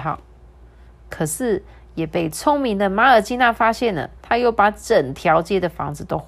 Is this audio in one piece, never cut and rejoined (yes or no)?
no